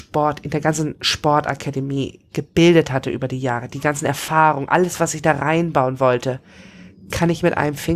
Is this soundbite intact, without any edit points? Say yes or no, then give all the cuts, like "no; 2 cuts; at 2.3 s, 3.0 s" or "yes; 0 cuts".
yes; 0 cuts